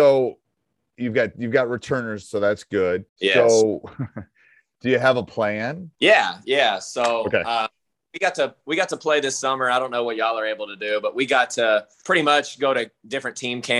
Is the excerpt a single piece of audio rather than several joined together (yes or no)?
no